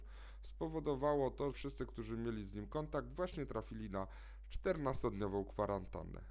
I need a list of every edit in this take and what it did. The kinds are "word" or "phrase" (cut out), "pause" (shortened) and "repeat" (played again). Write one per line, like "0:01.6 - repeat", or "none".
0:01.5 - word